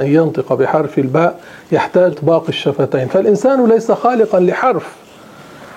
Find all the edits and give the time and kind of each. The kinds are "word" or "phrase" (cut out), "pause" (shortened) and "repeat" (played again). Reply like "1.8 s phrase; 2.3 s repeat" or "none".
2.1 s word